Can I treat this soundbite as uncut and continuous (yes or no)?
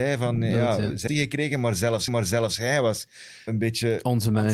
no